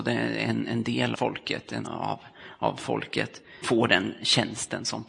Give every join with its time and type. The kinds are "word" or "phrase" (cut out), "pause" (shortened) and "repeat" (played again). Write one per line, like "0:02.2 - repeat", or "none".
0:01.1 - word
0:01.8 - word
0:03.6 - word